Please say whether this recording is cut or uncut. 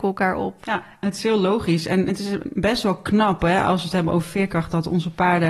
uncut